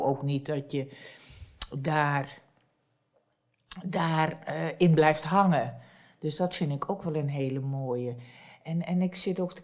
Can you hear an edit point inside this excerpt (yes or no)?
no